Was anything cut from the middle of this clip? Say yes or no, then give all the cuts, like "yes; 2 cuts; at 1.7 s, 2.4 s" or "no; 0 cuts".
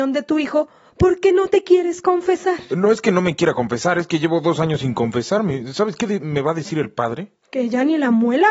no; 0 cuts